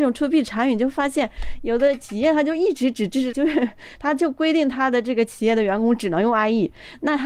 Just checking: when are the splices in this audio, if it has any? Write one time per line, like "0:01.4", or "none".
0:03.3